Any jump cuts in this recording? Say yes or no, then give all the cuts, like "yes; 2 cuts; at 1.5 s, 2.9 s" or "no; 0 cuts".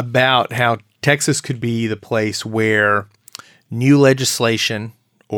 no; 0 cuts